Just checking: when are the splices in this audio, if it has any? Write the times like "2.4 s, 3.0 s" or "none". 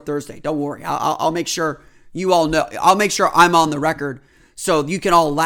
none